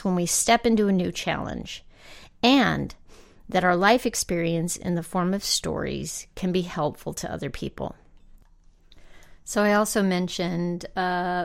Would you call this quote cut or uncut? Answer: uncut